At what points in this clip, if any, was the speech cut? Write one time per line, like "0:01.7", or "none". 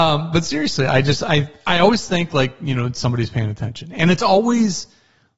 none

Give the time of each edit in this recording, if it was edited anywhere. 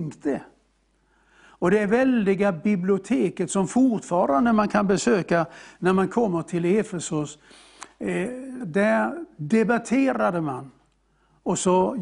0:08.6

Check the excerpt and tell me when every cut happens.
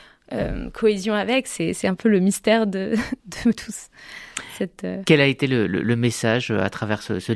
0:03.2

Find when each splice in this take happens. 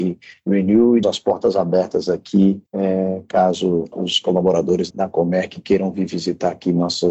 0:01.0
0:02.7
0:03.9
0:04.9

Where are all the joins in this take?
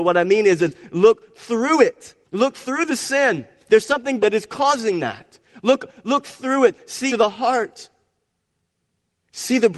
0:02.2
0:04.2
0:07.1

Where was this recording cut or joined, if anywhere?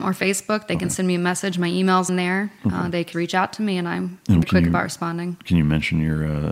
0:02.1
0:03.1
0:04.4

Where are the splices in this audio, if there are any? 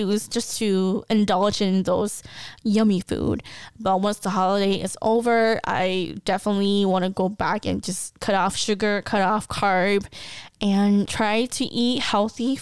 none

